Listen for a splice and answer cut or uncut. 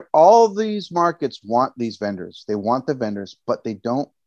uncut